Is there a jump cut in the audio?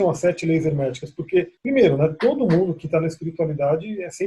yes; 1 cut; at 1.6 s

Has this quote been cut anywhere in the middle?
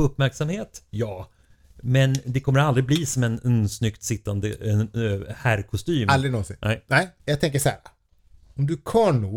no; 0 cuts

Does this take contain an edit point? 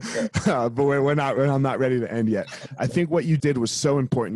yes; 1 cut; at 3.4 s

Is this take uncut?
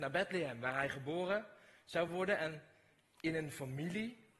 yes; 0 cuts

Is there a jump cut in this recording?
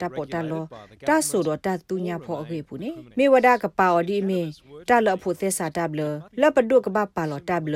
yes; 2 cuts; at 3.1 s, 6.3 s

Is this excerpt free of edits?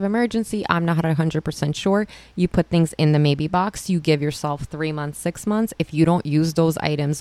yes; 0 cuts

